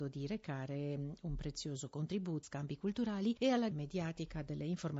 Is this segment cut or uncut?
cut